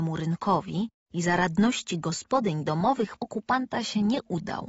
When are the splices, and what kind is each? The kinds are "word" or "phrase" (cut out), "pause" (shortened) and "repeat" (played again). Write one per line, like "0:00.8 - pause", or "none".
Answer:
0:03.2 - word